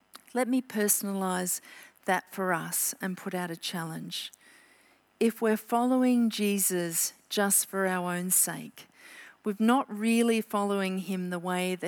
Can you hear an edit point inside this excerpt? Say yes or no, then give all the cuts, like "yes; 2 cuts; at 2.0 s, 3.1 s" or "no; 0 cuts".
no; 0 cuts